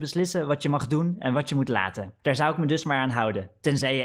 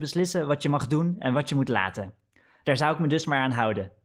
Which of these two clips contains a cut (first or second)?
first